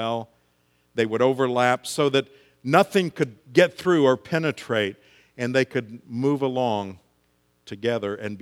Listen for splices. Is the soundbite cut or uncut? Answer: uncut